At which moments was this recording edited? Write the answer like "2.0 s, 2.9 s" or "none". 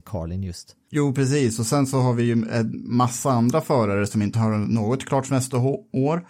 none